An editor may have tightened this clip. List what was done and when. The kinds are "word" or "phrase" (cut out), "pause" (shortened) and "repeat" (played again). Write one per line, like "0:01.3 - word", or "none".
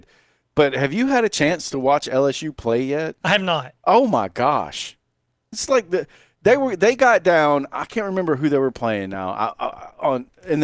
none